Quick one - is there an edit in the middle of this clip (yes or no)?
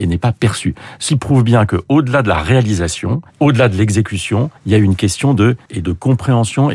yes